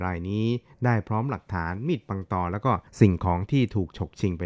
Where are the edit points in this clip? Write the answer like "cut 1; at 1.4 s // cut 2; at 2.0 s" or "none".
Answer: cut 1; at 2.9 s